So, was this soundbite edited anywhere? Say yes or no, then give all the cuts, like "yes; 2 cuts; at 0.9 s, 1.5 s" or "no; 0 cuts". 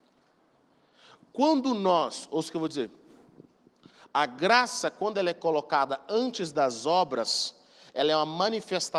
no; 0 cuts